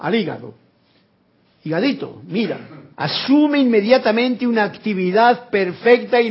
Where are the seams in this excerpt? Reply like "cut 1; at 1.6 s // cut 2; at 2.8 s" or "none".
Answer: cut 1; at 2.9 s